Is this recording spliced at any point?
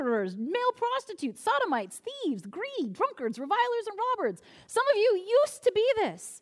no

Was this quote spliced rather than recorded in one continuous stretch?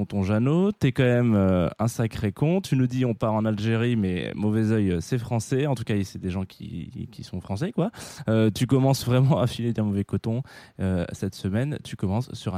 no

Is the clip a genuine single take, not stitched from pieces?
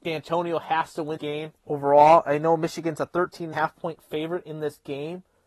no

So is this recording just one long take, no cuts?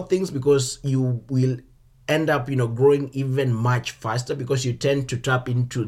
yes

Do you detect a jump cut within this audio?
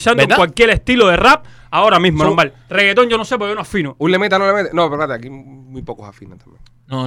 no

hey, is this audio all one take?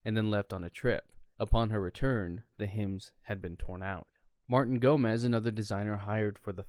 yes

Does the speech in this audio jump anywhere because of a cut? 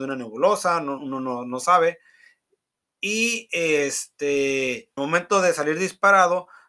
yes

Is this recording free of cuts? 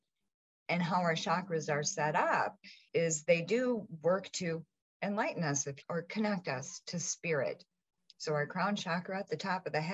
no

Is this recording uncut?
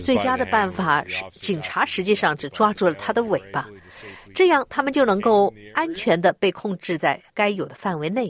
no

